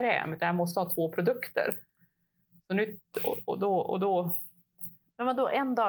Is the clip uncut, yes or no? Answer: yes